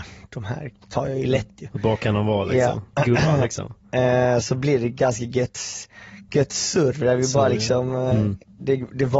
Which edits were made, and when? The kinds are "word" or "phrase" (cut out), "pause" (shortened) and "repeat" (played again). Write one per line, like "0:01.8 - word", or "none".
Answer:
0:04.4 - word